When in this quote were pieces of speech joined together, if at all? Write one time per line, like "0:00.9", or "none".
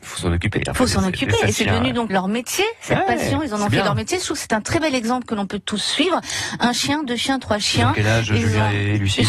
0:02.1